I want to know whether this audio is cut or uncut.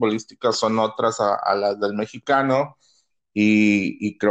uncut